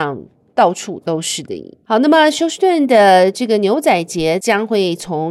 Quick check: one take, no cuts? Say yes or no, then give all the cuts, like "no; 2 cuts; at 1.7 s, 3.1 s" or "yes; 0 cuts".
no; 1 cut; at 1.8 s